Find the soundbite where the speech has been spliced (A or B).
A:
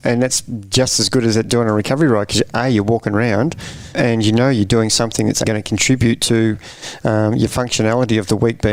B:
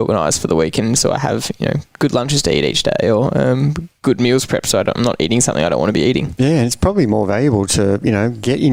A